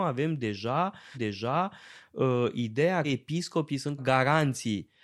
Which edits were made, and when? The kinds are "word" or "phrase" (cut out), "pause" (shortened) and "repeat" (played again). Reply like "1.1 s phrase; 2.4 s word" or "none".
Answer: 1.1 s repeat; 3.0 s word; 4.0 s word